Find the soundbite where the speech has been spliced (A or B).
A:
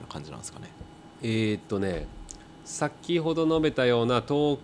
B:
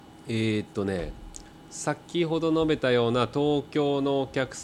A